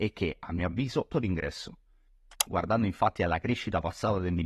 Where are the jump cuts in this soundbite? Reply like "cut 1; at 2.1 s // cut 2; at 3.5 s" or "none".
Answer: cut 1; at 1.1 s